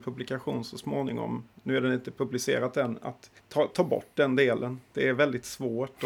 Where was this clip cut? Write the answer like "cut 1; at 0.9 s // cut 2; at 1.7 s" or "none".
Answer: cut 1; at 3.4 s